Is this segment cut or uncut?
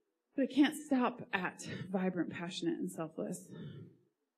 uncut